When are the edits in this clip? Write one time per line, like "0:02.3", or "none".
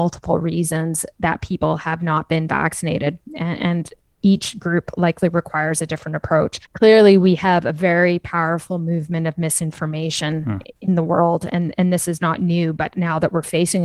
0:06.7
0:10.8